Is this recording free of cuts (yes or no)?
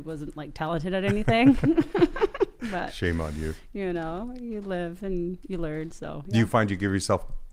yes